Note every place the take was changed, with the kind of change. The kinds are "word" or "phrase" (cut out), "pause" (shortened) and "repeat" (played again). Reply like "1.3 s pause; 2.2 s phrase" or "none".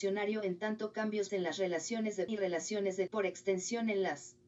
1.3 s word; 2.3 s word; 3.1 s word